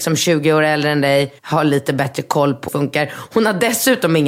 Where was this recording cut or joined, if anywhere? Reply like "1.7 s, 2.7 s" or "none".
1.4 s, 2.7 s